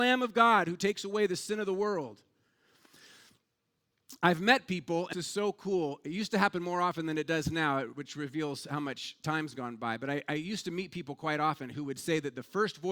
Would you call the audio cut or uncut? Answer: cut